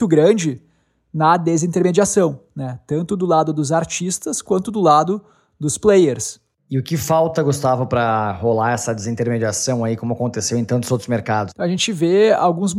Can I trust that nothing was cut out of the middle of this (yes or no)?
yes